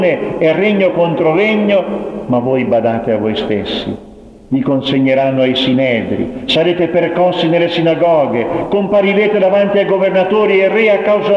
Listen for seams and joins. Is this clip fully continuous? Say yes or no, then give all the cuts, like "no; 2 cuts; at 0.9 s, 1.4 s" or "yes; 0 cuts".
yes; 0 cuts